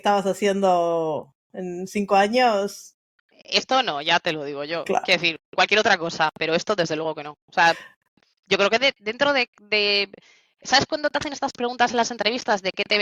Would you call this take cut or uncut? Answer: uncut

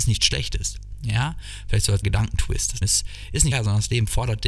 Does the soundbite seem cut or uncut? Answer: cut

